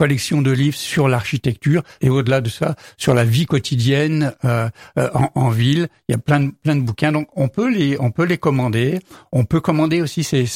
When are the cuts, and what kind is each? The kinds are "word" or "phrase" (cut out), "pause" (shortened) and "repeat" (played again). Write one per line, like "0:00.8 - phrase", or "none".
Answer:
none

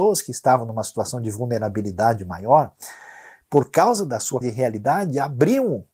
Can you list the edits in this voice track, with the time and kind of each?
0:04.4 - word

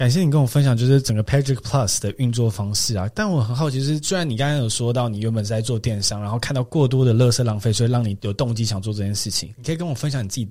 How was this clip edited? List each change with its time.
none

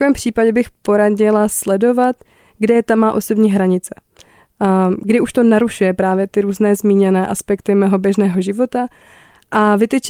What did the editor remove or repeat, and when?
none

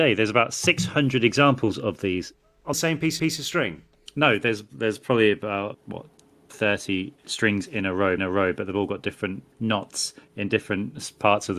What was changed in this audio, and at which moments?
0:02.7 - phrase
0:03.2 - repeat
0:05.7 - word
0:07.2 - pause
0:08.2 - repeat
0:09.5 - pause

